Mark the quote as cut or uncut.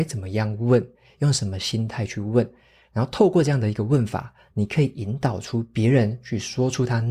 uncut